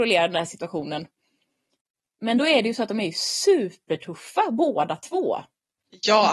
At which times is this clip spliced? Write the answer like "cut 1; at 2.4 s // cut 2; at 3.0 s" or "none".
none